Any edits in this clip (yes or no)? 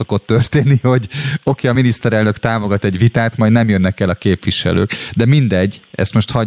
no